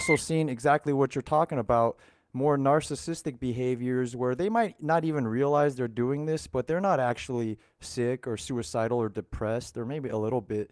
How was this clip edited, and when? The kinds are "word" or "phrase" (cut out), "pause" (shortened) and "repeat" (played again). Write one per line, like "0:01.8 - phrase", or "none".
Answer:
none